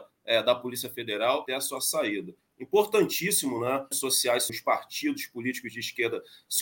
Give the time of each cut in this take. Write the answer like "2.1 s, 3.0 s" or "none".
1.5 s, 3.9 s, 4.5 s